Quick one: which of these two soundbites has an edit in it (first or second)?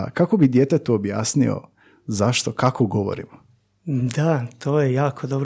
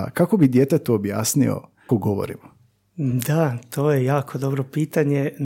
second